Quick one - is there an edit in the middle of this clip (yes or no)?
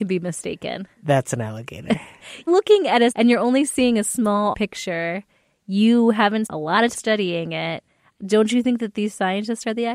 yes